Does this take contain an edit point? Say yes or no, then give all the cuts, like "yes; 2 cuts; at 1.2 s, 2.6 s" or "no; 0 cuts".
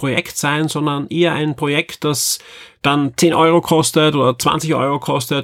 no; 0 cuts